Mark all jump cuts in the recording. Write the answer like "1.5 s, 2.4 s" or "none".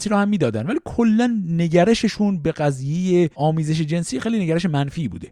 3.3 s